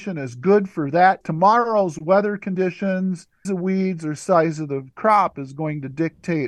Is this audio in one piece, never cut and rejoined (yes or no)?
no